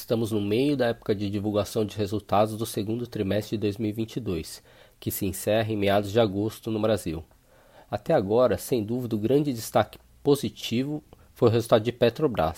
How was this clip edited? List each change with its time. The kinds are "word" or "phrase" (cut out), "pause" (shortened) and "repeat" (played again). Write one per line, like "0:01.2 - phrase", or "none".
none